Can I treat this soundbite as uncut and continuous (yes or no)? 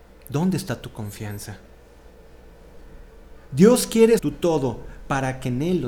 no